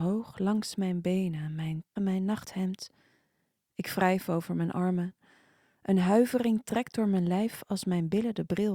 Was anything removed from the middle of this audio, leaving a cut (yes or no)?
yes